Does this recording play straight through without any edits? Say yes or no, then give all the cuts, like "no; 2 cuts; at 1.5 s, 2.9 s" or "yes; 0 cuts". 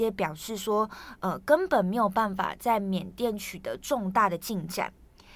yes; 0 cuts